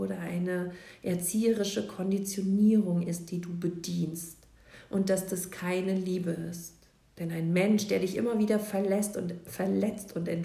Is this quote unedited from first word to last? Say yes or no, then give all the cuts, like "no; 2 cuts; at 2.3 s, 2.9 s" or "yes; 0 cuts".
yes; 0 cuts